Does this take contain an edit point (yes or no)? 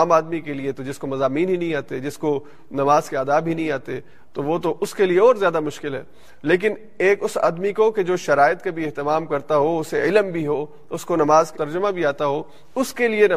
yes